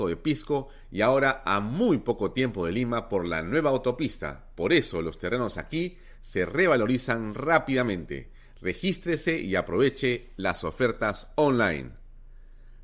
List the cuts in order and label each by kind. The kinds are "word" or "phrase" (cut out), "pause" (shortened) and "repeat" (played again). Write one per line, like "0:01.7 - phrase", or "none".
none